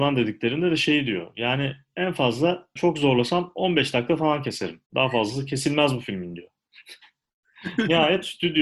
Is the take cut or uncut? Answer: cut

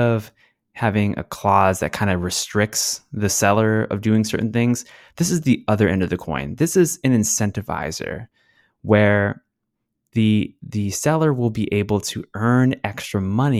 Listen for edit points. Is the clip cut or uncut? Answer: uncut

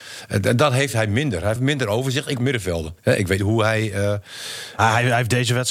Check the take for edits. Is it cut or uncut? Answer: cut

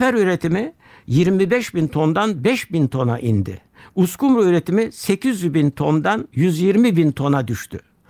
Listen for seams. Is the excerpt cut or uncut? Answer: uncut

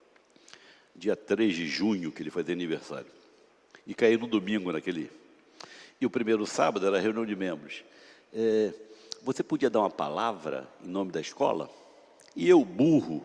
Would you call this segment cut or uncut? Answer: uncut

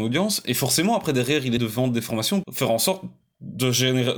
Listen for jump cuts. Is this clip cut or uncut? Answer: cut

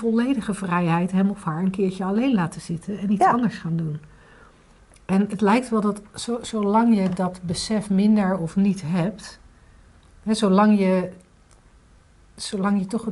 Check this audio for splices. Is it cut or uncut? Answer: uncut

